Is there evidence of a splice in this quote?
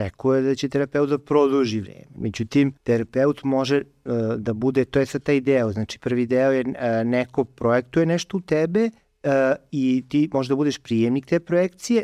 yes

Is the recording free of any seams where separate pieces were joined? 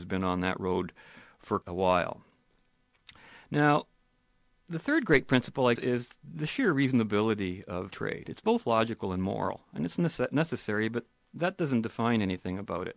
no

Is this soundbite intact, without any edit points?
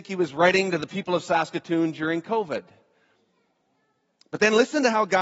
yes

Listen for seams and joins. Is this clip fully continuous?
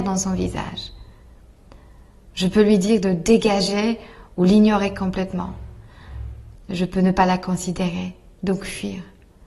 yes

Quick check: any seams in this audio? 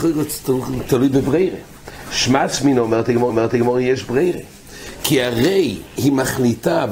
yes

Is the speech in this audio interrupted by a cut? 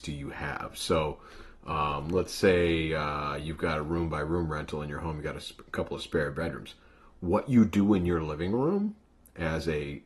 no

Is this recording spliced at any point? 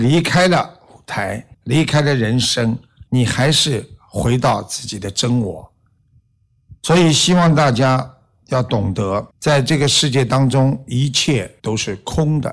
yes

